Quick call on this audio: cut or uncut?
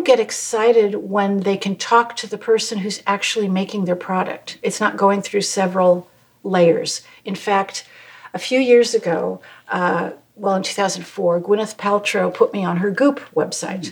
uncut